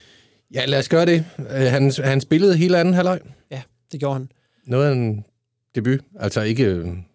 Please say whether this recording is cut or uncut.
uncut